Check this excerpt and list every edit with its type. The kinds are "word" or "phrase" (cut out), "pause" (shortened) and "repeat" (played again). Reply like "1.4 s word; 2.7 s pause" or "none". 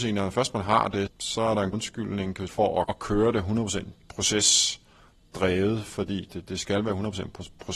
1.1 s word; 1.7 s word; 2.5 s word; 2.8 s word; 6.3 s word